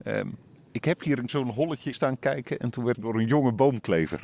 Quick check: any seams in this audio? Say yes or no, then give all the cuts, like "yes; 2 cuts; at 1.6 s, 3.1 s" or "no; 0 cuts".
yes; 3 cuts; at 1.3 s, 1.9 s, 2.9 s